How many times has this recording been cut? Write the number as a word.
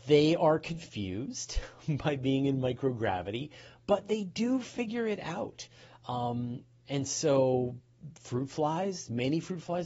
zero